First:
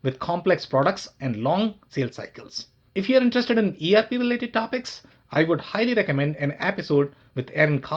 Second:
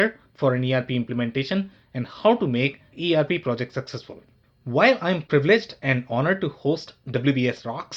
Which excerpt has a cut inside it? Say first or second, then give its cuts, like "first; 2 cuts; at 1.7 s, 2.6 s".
second; 1 cut; at 2.9 s